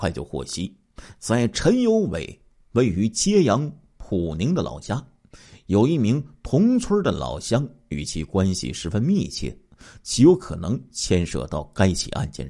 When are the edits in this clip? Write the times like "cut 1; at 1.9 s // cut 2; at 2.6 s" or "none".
none